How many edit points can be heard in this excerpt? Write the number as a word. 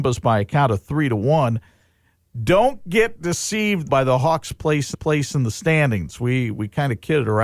two